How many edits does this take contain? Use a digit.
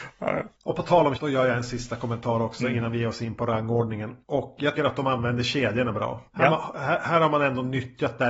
3